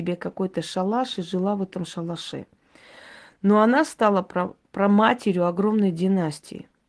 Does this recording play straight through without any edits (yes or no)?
yes